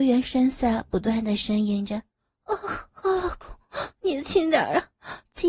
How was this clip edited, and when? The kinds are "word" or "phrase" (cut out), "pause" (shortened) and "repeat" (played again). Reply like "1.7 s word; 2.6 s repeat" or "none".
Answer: 2.1 s pause